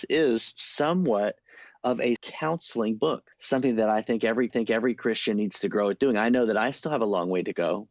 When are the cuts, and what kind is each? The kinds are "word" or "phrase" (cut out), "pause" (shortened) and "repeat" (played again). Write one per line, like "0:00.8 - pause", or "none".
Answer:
0:02.2 - word
0:03.3 - pause
0:04.5 - repeat